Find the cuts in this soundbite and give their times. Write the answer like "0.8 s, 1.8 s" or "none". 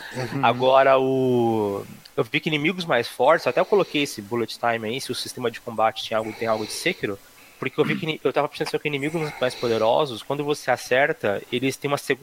none